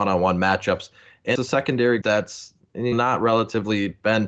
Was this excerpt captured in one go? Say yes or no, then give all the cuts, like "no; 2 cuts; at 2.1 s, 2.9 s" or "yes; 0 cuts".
no; 3 cuts; at 1.3 s, 2.0 s, 2.9 s